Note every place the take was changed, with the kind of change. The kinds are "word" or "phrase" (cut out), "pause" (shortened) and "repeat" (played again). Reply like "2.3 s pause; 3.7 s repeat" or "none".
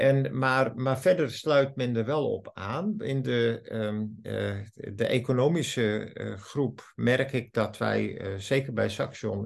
none